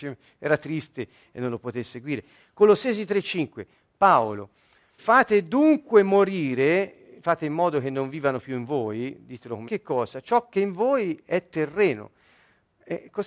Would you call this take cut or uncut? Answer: cut